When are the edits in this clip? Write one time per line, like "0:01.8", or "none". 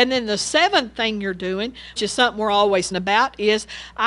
0:02.0
0:02.9